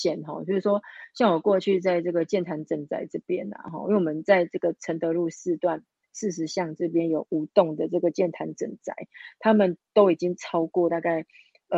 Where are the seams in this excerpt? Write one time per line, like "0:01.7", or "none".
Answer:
none